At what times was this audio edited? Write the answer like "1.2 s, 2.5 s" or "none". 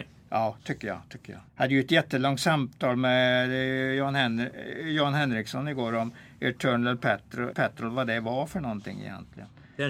1.5 s, 7.5 s

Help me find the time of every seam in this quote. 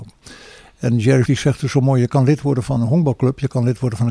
1.3 s, 2.8 s

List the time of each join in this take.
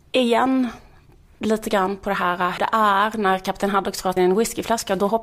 2.6 s, 4.2 s

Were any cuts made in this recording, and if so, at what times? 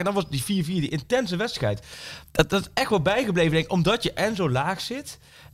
none

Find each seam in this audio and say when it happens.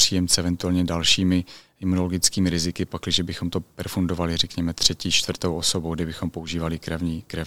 none

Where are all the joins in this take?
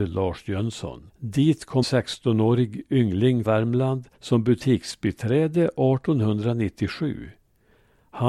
1.1 s, 1.8 s, 3.4 s, 4.1 s

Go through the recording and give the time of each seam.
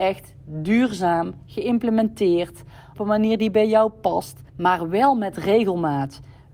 3.0 s, 4.5 s

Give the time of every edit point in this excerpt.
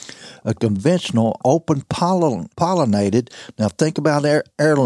2.5 s

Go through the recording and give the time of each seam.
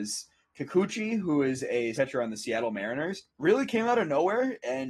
1.9 s, 3.3 s

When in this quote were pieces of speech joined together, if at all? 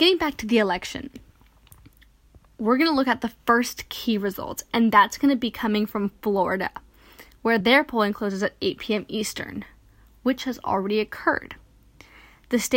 none

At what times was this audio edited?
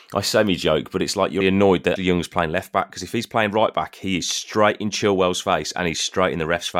1.4 s, 2.0 s

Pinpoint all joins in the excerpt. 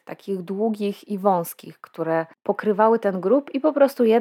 none

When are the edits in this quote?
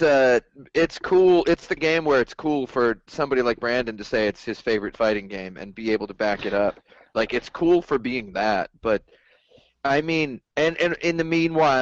1.8 s

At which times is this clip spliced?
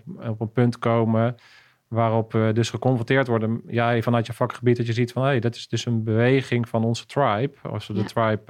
none

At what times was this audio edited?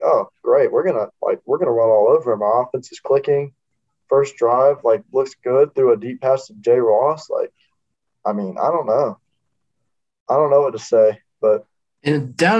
none

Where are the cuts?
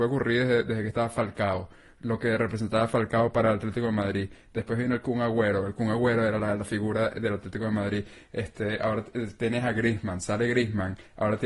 none

